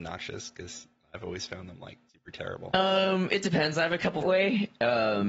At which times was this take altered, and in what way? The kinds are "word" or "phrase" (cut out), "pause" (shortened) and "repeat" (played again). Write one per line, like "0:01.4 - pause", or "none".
0:02.1 - pause
0:04.2 - phrase